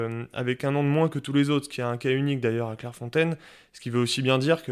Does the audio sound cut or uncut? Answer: uncut